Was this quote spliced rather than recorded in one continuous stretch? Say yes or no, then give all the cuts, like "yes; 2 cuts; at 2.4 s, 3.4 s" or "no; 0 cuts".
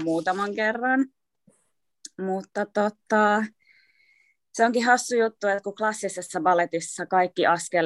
no; 0 cuts